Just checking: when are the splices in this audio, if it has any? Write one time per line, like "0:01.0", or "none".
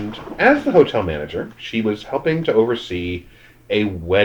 none